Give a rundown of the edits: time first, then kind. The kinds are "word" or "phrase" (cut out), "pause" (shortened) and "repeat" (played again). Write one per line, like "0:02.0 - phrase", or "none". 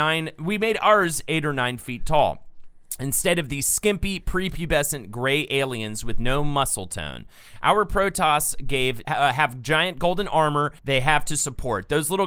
0:09.0 - word
0:10.8 - pause